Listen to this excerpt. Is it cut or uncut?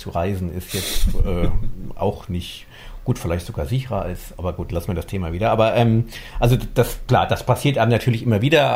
uncut